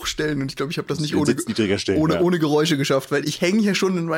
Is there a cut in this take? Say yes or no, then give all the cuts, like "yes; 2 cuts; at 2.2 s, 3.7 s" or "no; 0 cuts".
yes; 1 cut; at 3.2 s